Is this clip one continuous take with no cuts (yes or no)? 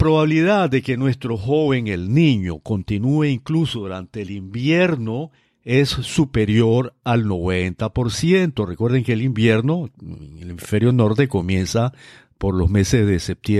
yes